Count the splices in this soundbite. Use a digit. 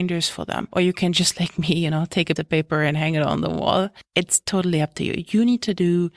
1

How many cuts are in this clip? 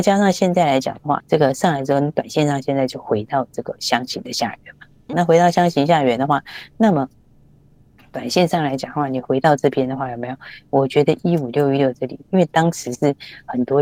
2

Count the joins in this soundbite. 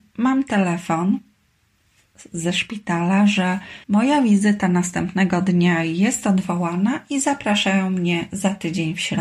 1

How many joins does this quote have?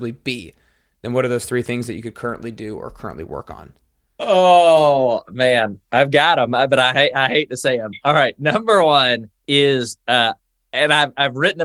1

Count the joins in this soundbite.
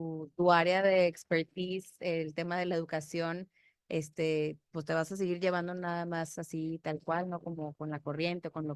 1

